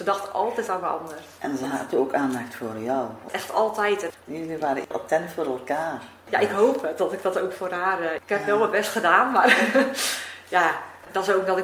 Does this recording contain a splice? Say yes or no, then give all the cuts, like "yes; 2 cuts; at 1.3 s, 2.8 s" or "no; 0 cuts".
no; 0 cuts